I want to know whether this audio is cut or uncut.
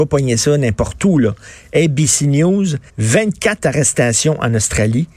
cut